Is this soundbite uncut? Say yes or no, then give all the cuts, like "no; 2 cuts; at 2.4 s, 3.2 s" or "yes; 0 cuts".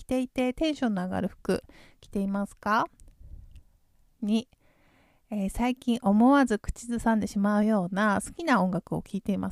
yes; 0 cuts